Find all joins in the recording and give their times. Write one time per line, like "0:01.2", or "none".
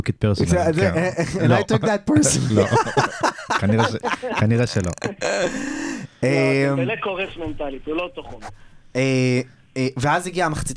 none